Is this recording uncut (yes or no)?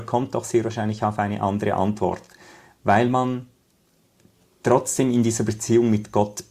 yes